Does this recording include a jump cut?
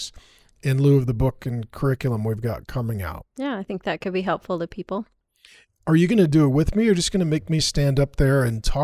no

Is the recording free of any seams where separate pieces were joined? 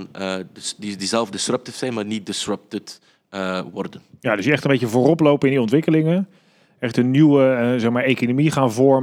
yes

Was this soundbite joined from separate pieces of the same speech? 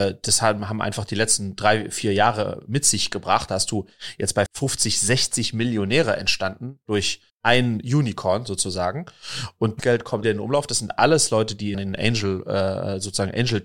yes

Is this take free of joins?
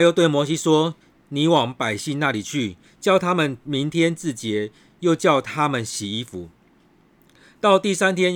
no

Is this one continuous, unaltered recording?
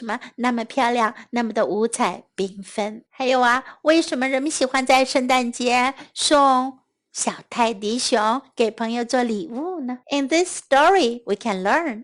no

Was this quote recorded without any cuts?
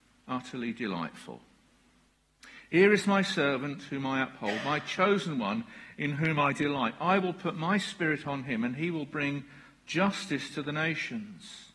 yes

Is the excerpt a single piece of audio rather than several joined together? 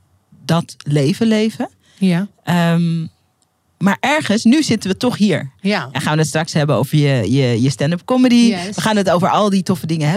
yes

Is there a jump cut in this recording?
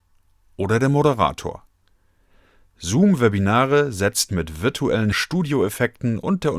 yes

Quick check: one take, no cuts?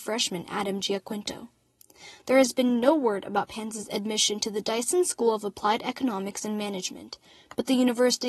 yes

